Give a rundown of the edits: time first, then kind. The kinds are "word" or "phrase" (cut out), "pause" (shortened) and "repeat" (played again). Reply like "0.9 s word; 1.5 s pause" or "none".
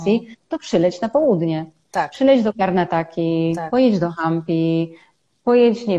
none